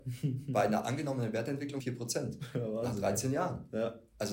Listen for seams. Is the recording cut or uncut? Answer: cut